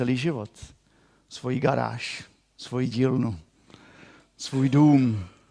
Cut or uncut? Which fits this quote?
uncut